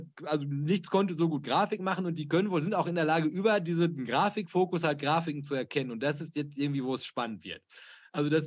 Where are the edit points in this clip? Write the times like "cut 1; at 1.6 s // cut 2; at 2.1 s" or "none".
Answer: none